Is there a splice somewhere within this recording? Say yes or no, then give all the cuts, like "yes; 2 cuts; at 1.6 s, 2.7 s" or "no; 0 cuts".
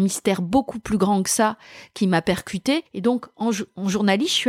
yes; 1 cut; at 2.9 s